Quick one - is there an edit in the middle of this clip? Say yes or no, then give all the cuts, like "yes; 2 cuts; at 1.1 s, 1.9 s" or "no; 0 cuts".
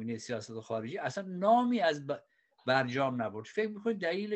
no; 0 cuts